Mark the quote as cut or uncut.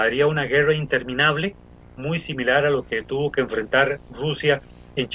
uncut